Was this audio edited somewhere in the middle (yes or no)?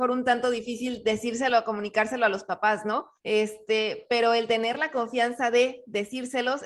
yes